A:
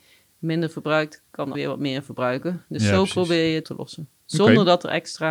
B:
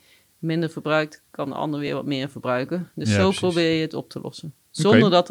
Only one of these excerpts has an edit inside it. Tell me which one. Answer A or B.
A